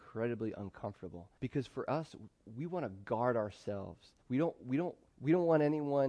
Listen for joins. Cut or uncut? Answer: cut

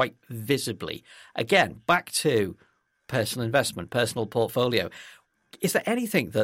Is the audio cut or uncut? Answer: uncut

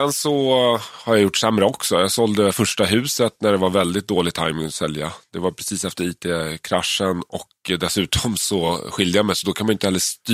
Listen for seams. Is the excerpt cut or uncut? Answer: uncut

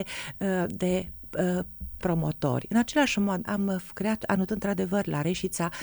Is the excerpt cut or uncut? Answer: cut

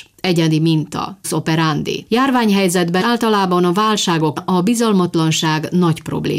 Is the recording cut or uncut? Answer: cut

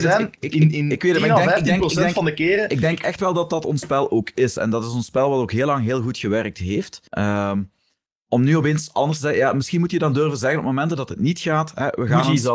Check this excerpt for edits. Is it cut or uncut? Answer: cut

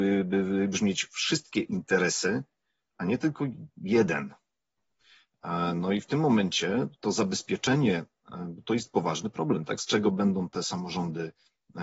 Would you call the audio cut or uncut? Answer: uncut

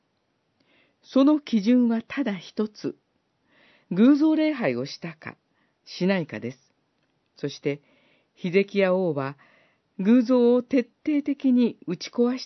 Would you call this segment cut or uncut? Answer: uncut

